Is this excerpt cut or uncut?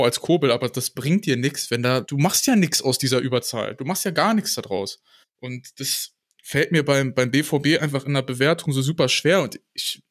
cut